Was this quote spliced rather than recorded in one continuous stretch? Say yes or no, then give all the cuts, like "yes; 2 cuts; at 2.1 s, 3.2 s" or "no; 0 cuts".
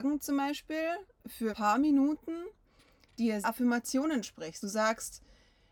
yes; 3 cuts; at 1.5 s, 3.4 s, 4.6 s